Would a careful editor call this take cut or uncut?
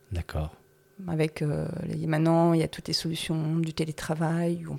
uncut